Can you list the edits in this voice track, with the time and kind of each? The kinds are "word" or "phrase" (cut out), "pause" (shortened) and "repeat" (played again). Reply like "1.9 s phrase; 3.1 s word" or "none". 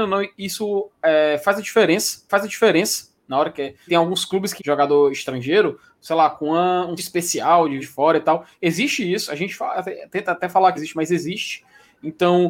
2.3 s repeat; 3.9 s word; 4.6 s word; 7.0 s word; 7.8 s word; 10.8 s word